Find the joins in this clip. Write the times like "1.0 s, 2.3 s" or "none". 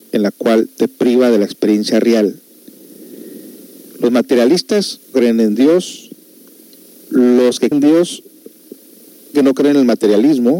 5.1 s, 7.7 s, 9.3 s